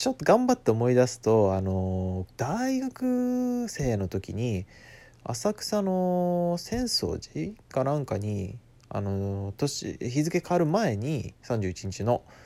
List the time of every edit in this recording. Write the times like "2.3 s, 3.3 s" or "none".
2.4 s, 8.8 s